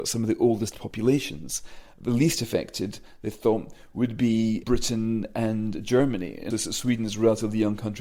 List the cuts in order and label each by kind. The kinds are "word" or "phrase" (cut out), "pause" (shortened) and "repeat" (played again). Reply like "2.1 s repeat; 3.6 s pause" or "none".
4.6 s word; 6.5 s word